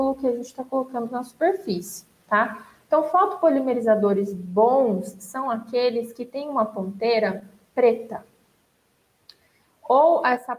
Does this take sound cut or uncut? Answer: uncut